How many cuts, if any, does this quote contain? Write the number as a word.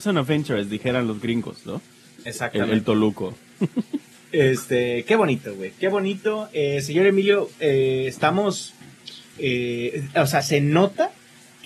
zero